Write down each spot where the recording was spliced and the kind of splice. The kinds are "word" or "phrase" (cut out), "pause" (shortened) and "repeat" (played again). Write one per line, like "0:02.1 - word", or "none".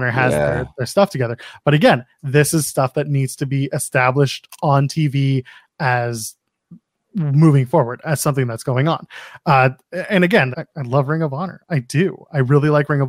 0:10.5 - word

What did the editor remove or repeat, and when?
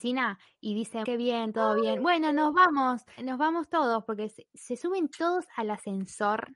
0:01.0 - word
0:03.2 - phrase

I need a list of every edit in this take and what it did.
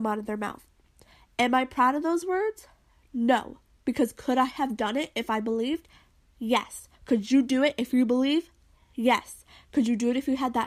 0:06.9 - pause

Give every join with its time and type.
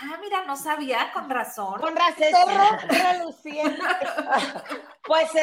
0:02.2 - word

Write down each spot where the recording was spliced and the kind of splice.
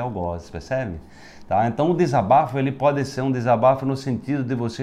none

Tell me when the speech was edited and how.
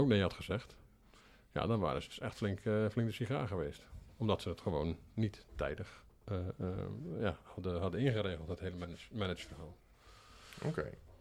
none

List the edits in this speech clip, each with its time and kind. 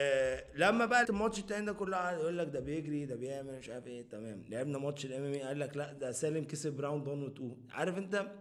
0:01.0 - word

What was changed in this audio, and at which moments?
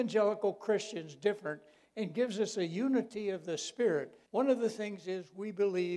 0:04.3 - pause

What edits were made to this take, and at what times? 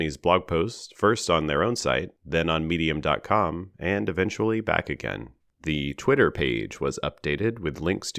0:02.2 - pause
0:05.4 - pause

